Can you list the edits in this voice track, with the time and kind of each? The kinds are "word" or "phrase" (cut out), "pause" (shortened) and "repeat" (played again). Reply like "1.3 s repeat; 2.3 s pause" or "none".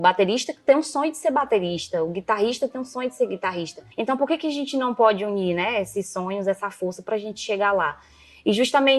3.9 s pause